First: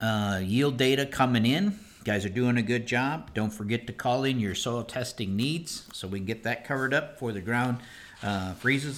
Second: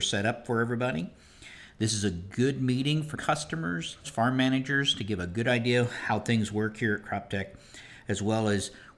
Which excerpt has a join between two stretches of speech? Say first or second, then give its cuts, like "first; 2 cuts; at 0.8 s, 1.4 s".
second; 2 cuts; at 3.1 s, 4.0 s